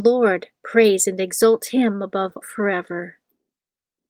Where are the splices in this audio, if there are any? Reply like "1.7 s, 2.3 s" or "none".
2.4 s